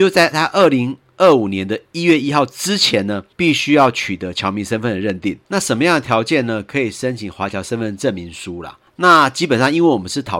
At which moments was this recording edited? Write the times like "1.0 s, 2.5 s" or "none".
5.4 s